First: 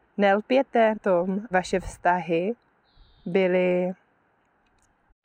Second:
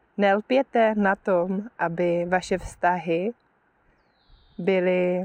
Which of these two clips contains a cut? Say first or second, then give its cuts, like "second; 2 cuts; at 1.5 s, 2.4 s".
first; 3 cuts; at 0.9 s, 1.5 s, 2.8 s